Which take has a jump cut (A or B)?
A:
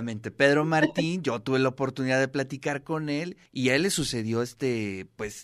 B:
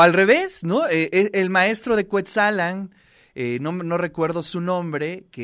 A